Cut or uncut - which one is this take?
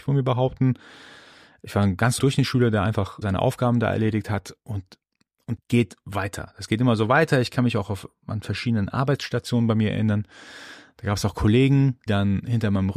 cut